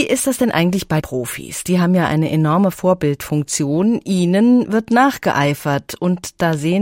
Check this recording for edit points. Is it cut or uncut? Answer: cut